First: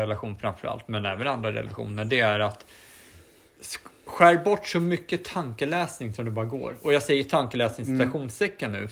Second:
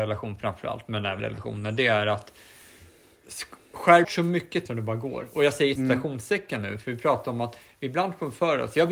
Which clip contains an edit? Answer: second; 4 cuts; at 1.2 s, 4.0 s, 4.7 s, 5.8 s

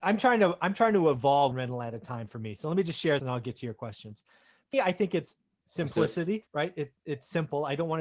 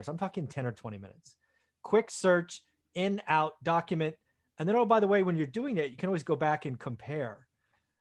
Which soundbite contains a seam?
first; 4 cuts; at 1.5 s, 3.2 s, 4.7 s, 6.5 s

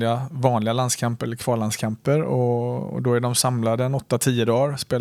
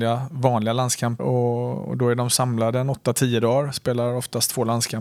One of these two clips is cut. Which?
second; 1 cut; at 1.2 s

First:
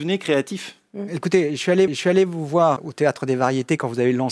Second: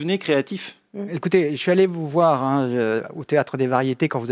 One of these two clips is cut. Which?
first; 2 cuts; at 1.9 s, 2.8 s

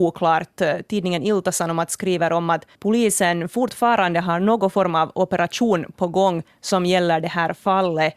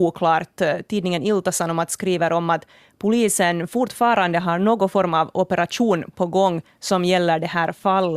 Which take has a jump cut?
first; 1 cut; at 2.7 s

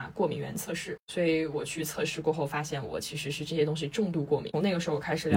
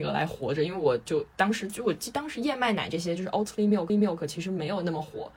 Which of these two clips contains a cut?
second; 1 cut; at 3.9 s

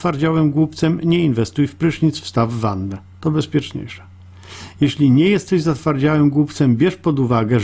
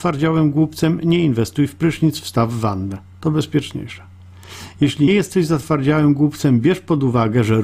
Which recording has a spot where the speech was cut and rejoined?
second; 1 cut; at 5.1 s

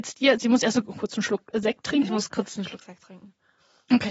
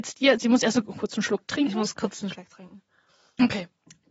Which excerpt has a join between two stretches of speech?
second; 2 cuts; at 1.5 s, 2.3 s

